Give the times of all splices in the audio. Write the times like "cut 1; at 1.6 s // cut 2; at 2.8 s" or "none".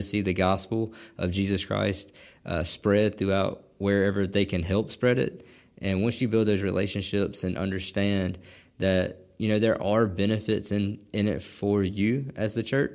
none